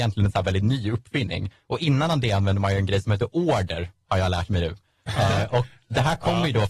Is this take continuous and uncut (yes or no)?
yes